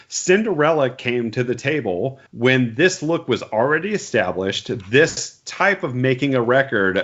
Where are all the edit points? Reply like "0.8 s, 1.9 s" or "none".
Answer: 2.3 s